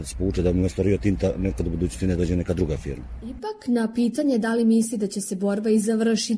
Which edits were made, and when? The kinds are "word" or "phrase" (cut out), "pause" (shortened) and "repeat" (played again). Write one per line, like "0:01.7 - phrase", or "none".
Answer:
none